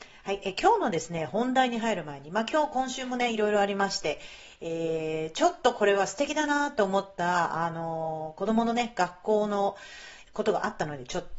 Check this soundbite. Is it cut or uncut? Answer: cut